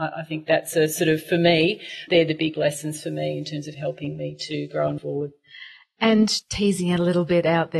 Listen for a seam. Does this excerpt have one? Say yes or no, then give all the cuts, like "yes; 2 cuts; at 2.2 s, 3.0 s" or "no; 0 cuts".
yes; 3 cuts; at 2.1 s, 5.0 s, 6.4 s